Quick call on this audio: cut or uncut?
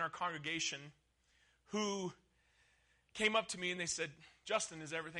uncut